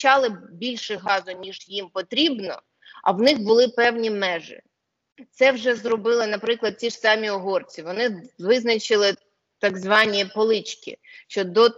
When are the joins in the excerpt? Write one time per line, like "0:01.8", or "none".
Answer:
none